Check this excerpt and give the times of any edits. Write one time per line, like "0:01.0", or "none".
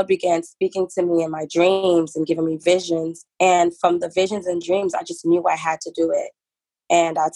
0:03.3